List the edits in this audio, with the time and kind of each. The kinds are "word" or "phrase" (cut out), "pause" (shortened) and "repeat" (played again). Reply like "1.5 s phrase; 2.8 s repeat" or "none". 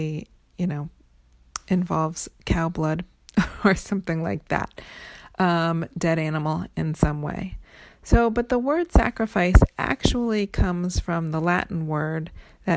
none

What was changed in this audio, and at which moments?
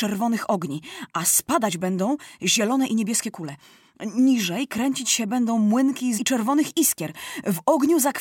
6.2 s word

